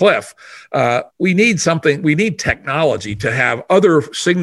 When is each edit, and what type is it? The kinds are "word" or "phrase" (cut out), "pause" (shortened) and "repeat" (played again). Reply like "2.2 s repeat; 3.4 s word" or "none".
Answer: 1.1 s pause